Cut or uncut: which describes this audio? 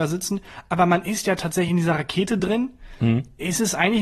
uncut